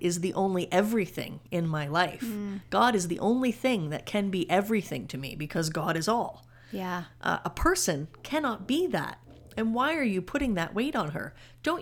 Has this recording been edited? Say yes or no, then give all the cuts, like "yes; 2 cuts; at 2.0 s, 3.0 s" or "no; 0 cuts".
no; 0 cuts